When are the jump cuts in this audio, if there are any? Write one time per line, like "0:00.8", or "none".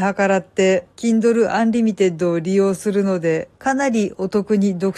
0:00.9
0:03.5